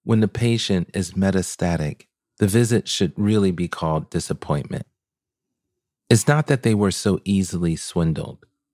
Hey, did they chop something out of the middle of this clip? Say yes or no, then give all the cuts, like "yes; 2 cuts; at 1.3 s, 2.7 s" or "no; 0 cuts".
no; 0 cuts